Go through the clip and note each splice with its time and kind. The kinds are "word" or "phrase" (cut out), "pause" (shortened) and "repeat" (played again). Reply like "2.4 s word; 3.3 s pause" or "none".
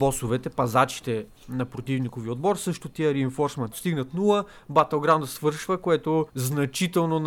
3.7 s phrase; 6.3 s pause